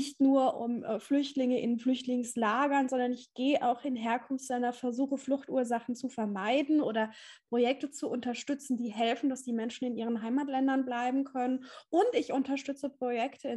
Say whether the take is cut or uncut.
uncut